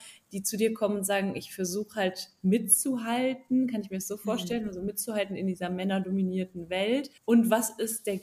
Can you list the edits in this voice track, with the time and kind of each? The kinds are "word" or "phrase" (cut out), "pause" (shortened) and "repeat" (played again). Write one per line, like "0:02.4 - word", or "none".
0:07.2 - pause

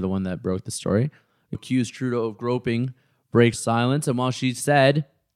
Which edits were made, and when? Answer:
0:01.5 - phrase
0:03.5 - word

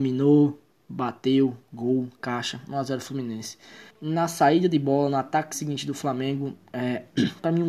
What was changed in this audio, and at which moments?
0:03.9 - pause

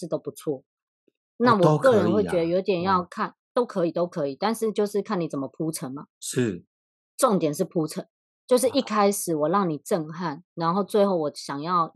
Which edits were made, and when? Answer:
0:06.1 - pause
0:08.2 - pause
0:10.4 - pause

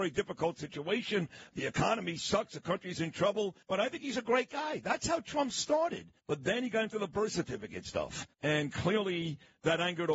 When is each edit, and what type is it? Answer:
0:03.6 - pause
0:06.2 - pause
0:08.3 - pause

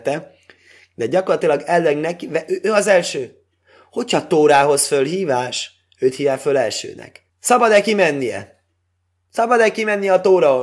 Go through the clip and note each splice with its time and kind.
0:07.3 - pause

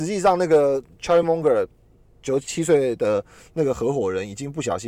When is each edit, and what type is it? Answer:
none

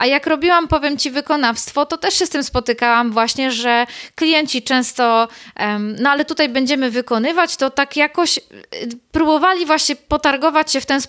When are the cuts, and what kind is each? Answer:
none

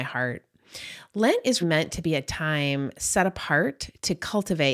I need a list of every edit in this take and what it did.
0:01.6 - word

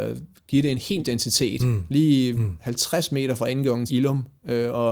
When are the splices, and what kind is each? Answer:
0:01.0 - word
0:03.9 - word

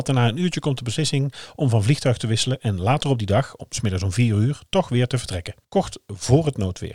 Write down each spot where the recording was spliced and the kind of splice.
0:05.6 - pause

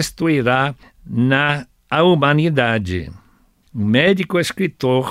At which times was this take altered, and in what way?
none

